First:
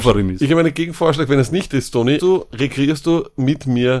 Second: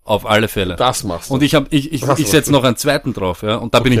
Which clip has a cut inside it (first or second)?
first